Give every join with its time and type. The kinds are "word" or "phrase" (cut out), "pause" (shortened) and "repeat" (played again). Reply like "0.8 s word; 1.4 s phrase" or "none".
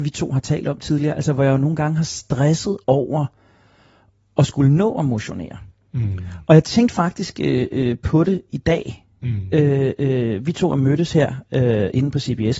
2.8 s pause